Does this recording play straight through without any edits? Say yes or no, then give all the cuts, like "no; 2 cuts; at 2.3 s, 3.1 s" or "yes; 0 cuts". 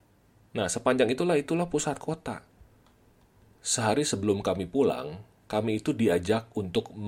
yes; 0 cuts